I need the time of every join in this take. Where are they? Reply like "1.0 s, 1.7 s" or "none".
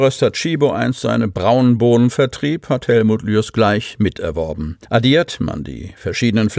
4.8 s